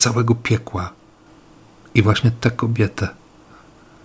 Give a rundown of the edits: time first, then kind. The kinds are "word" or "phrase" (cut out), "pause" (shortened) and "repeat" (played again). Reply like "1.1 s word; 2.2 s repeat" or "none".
none